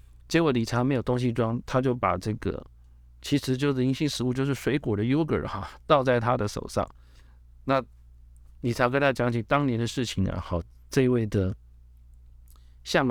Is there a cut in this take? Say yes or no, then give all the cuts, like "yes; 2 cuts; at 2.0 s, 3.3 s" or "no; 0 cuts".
no; 0 cuts